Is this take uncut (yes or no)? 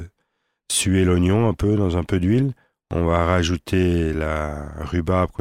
yes